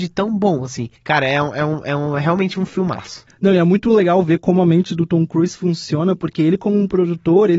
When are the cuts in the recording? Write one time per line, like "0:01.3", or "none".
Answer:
0:01.0